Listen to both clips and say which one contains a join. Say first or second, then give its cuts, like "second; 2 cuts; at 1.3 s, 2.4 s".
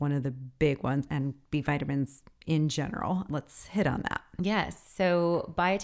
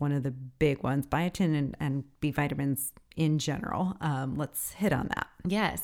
first; 2 cuts; at 1.1 s, 3.3 s